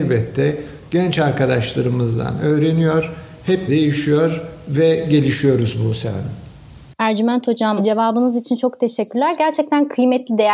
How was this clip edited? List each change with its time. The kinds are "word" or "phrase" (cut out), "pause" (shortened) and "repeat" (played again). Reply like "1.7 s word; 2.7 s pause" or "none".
3.7 s word